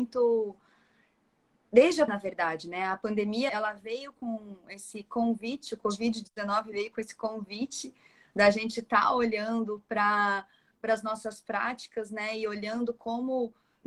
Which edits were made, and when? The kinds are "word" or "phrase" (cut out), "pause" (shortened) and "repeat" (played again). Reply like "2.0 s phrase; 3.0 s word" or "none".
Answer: 2.1 s word; 3.5 s word